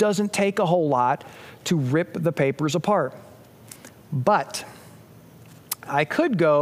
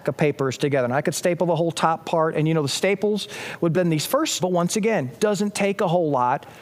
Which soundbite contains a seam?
second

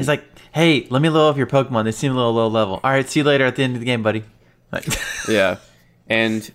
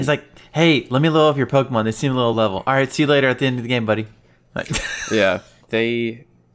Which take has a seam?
second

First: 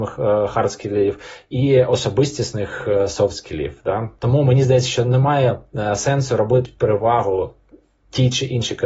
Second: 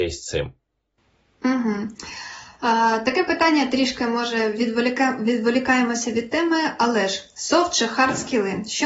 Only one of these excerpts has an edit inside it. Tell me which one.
first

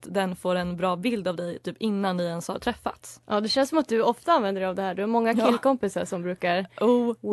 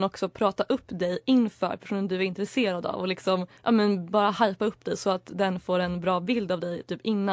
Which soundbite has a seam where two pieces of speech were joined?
second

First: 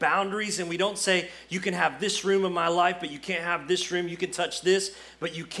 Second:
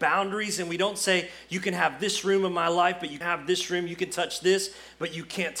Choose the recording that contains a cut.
second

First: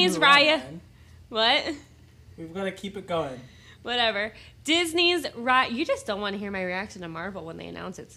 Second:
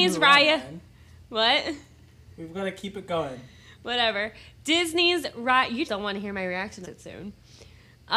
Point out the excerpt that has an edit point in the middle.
second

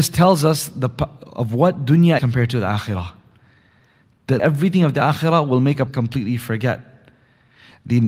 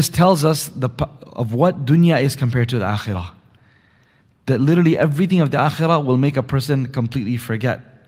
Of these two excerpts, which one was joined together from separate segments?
first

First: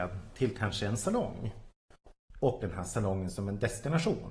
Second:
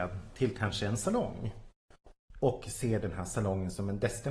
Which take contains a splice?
first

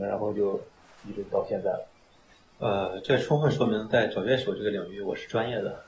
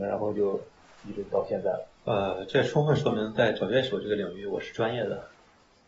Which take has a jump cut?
second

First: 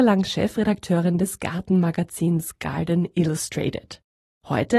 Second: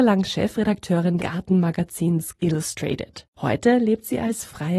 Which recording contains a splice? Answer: second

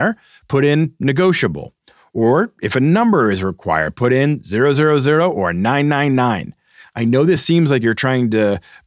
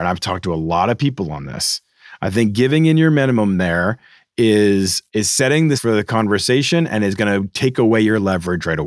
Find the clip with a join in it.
second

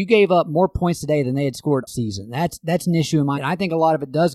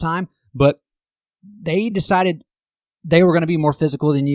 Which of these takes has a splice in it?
first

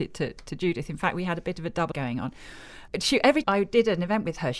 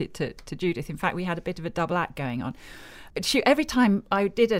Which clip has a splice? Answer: first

